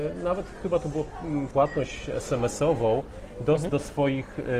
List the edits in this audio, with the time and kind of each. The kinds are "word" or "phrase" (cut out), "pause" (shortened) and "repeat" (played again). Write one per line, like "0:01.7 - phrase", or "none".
0:01.5 - phrase
0:03.7 - word